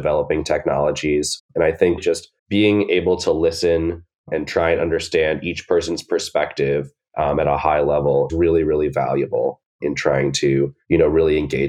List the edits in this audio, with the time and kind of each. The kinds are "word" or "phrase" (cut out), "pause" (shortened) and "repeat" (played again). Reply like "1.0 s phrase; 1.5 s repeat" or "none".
2.0 s word; 2.4 s pause; 8.3 s word